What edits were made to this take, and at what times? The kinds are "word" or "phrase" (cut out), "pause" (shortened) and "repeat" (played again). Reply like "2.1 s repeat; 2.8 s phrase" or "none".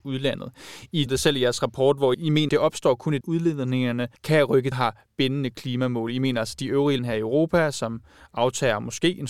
1.1 s word; 2.1 s word; 2.5 s word; 3.2 s phrase; 4.2 s pause; 4.7 s phrase; 7.0 s word